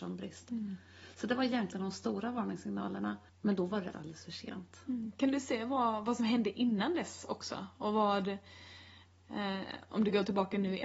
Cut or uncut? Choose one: cut